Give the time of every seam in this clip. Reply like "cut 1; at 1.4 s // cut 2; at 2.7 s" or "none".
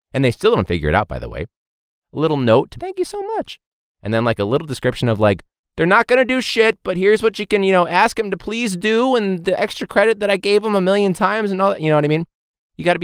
cut 1; at 2.8 s